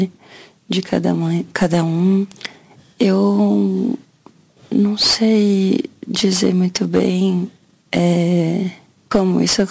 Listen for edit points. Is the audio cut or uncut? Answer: uncut